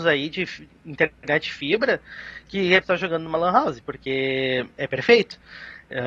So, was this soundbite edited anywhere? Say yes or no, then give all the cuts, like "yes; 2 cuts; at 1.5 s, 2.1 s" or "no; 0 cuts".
yes; 1 cut; at 2.8 s